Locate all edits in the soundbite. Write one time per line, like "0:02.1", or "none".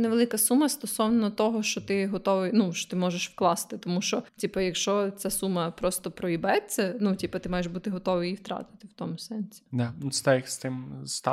0:04.3